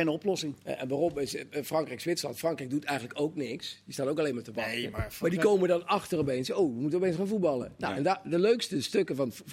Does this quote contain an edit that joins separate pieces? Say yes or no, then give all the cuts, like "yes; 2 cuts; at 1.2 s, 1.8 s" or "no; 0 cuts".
no; 0 cuts